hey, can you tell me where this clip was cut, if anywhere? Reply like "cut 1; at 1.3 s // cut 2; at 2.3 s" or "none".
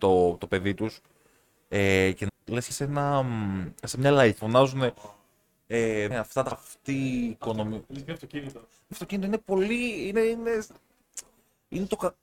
cut 1; at 2.3 s // cut 2; at 2.7 s // cut 3; at 4.4 s // cut 4; at 6.1 s // cut 5; at 6.5 s // cut 6; at 8.9 s